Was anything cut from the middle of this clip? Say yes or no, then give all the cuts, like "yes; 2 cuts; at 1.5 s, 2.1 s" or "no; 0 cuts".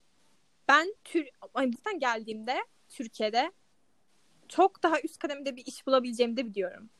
yes; 2 cuts; at 1.0 s, 1.7 s